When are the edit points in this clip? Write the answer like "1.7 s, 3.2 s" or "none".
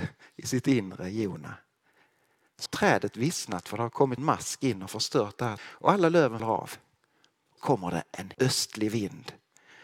2.7 s, 4.2 s, 5.6 s, 6.4 s, 7.6 s, 8.3 s